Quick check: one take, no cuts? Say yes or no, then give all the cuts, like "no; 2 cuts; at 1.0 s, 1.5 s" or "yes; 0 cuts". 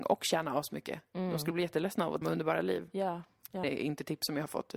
no; 2 cuts; at 2.2 s, 3.6 s